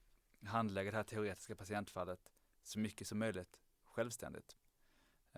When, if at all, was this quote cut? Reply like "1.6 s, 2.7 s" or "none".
none